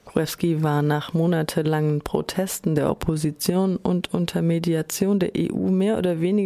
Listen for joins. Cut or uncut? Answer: uncut